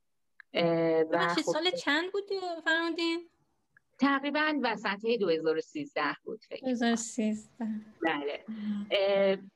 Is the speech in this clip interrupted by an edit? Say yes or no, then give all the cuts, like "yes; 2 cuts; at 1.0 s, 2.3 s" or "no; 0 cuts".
no; 0 cuts